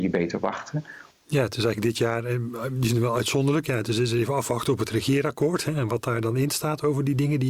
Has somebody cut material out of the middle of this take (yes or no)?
yes